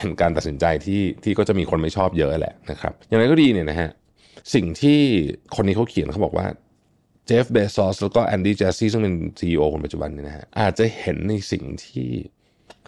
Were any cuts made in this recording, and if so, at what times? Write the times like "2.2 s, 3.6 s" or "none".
3.0 s, 4.4 s, 5.4 s, 10.5 s